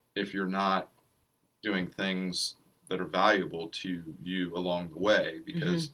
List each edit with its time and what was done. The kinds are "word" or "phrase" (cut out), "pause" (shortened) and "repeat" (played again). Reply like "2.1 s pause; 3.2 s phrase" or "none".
none